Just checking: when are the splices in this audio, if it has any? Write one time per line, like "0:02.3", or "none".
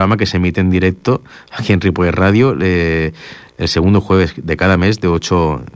none